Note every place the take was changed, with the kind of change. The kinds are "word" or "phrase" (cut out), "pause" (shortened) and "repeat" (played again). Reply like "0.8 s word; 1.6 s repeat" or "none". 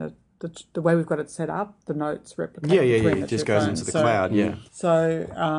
4.7 s pause